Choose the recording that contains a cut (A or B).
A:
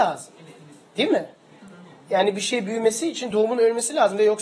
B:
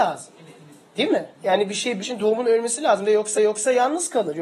B